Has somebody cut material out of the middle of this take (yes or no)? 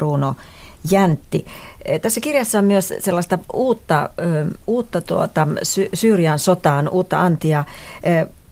yes